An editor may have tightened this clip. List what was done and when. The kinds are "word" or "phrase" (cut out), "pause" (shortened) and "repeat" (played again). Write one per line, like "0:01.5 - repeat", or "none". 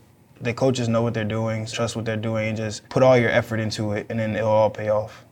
0:01.7 - phrase
0:02.8 - pause